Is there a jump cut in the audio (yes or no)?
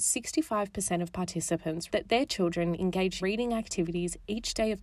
yes